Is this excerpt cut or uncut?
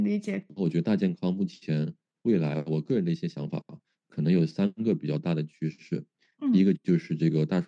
uncut